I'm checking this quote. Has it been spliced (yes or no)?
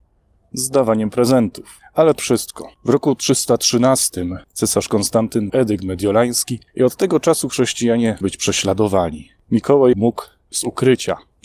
yes